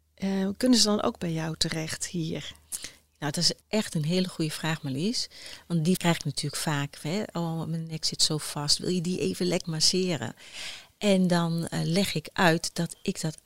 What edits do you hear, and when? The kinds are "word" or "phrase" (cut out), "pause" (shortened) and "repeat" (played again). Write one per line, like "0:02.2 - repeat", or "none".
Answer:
0:03.6 - pause
0:06.0 - word
0:09.6 - word

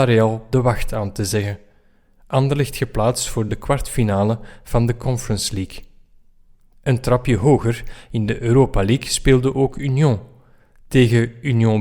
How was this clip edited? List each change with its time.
none

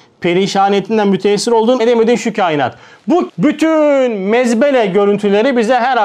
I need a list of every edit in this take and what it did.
0:01.8 - word
0:03.3 - word

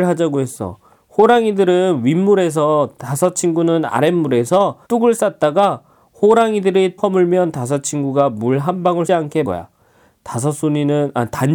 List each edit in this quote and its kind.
0:04.9 - pause
0:07.0 - word
0:09.1 - word
0:09.4 - word

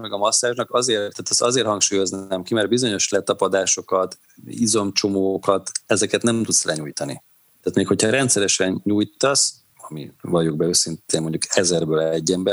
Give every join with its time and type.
0:07.4 - pause
0:10.2 - pause

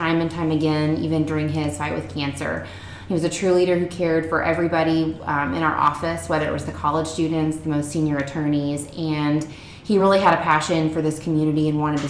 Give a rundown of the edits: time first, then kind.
none

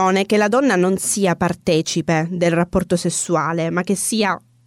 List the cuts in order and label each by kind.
none

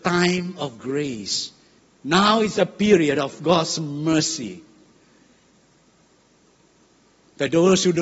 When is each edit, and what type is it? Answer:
0:01.8 - pause

